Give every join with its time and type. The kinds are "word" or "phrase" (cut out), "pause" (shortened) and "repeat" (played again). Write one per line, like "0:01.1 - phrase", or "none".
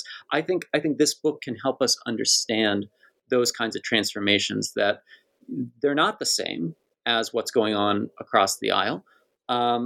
none

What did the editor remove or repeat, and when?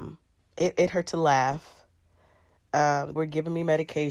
0:03.2 - word

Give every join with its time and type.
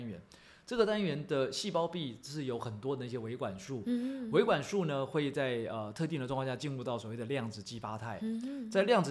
none

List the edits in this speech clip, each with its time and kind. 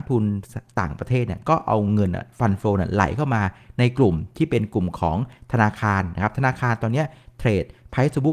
none

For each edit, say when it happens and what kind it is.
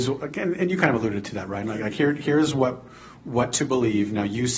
none

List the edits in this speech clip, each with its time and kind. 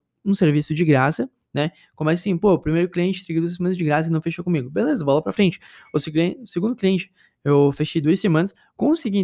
none

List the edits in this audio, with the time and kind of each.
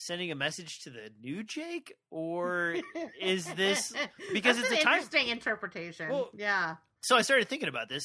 none

